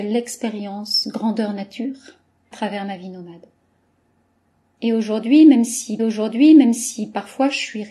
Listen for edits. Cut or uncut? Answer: cut